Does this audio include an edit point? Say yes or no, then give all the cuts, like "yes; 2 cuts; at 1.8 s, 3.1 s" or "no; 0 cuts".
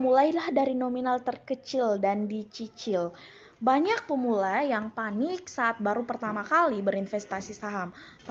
no; 0 cuts